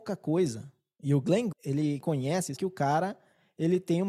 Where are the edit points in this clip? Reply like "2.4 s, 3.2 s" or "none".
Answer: 1.5 s, 2.0 s, 2.6 s